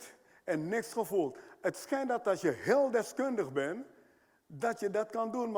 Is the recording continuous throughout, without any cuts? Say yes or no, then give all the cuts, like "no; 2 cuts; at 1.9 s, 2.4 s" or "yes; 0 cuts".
yes; 0 cuts